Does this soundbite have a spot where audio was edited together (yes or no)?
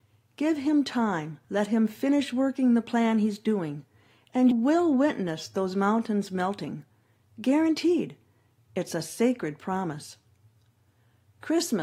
yes